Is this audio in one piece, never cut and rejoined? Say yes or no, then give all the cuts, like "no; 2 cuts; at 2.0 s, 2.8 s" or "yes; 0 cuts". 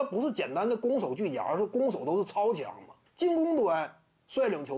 no; 1 cut; at 3.1 s